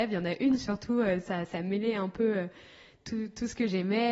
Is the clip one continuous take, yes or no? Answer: yes